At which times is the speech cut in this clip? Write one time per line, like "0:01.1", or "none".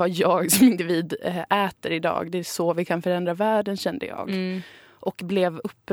none